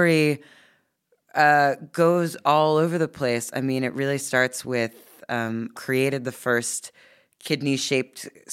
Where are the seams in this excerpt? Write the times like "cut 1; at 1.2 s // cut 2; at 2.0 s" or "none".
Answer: cut 1; at 5.7 s